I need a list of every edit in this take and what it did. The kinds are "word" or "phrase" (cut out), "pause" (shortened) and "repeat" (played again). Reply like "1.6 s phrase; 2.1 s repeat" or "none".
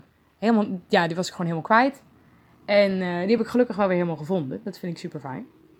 none